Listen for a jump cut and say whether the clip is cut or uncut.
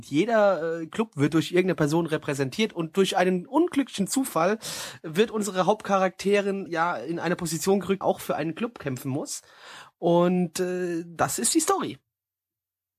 cut